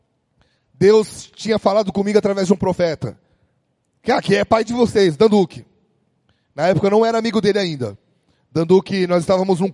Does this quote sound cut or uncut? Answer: uncut